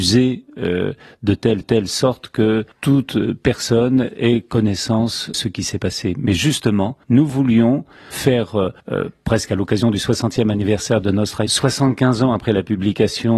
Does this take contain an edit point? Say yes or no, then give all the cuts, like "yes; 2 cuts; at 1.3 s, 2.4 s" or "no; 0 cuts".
yes; 7 cuts; at 1.6 s, 2.7 s, 5.3 s, 7.0 s, 8.1 s, 8.8 s, 11.5 s